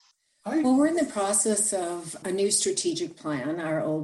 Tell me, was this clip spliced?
yes; 1 cut; at 2.2 s

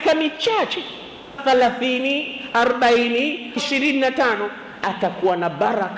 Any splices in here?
yes; 3 cuts; at 1.4 s, 3.6 s, 4.8 s

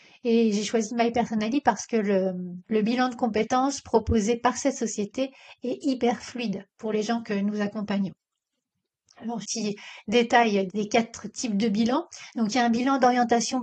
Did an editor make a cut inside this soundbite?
yes; 3 cuts; at 2.6 s, 9.4 s, 10.7 s

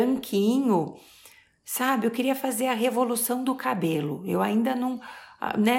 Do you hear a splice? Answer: no; 0 cuts

